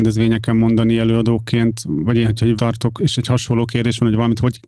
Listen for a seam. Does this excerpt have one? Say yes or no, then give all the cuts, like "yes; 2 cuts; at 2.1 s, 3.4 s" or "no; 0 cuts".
yes; 2 cuts; at 2.6 s, 3.0 s